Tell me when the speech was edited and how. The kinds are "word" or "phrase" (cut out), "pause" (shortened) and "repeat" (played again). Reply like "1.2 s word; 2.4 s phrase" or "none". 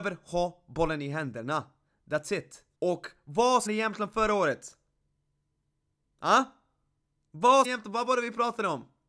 2.7 s pause; 3.7 s word; 7.6 s word